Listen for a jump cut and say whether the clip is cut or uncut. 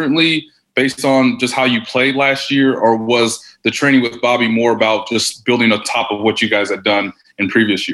uncut